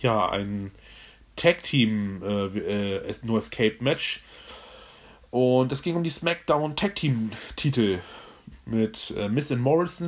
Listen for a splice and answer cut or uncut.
uncut